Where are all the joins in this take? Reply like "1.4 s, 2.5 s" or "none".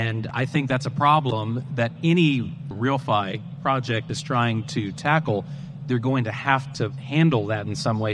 none